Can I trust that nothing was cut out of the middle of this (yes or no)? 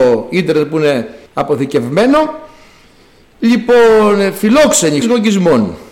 no